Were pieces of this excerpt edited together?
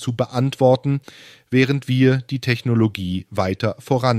no; 0 cuts

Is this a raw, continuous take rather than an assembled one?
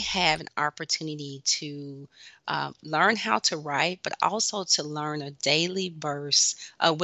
yes; 0 cuts

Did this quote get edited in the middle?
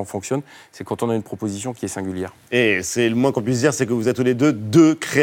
no; 0 cuts

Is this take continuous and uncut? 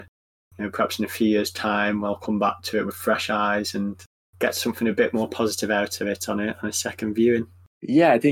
yes; 0 cuts

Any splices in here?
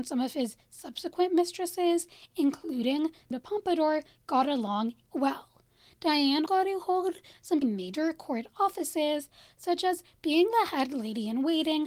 yes; 4 cuts; at 3.3 s, 5.1 s, 6.5 s, 7.6 s

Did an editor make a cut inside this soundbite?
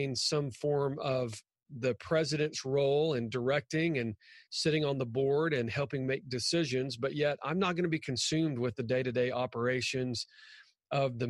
no; 0 cuts

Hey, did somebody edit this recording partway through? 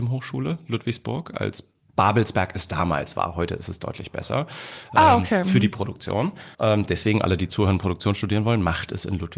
yes; 1 cut; at 6.5 s

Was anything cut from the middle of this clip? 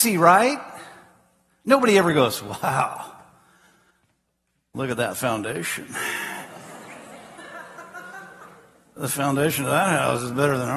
no; 0 cuts

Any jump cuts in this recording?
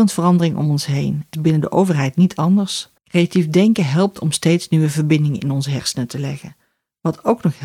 yes; 2 cuts; at 1.3 s, 3.0 s

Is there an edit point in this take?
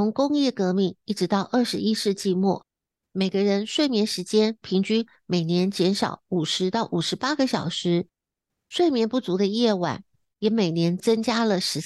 no; 0 cuts

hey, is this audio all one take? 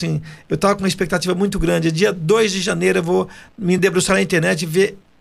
yes; 0 cuts

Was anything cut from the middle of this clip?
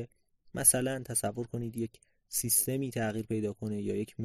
no; 0 cuts

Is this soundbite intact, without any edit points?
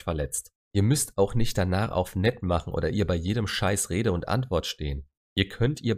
yes; 0 cuts

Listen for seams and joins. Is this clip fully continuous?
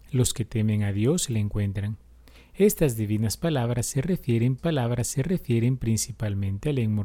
no; 1 cut; at 4.6 s

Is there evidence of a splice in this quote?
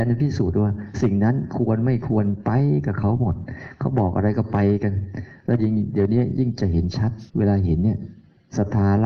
yes; 1 cut; at 7.3 s

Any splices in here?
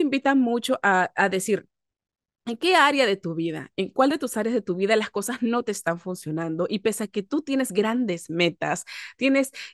no; 0 cuts

